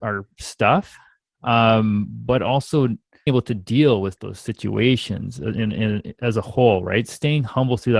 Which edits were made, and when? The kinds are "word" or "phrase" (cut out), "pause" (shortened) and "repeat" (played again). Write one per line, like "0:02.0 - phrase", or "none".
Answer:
0:03.3 - word